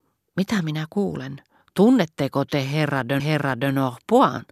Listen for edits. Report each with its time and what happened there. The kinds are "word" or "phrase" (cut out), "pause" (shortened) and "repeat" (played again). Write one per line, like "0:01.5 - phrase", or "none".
0:03.2 - repeat